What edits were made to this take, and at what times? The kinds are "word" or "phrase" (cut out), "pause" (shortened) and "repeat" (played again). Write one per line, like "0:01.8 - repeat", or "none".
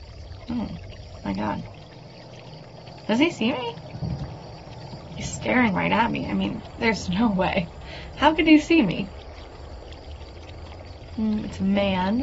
none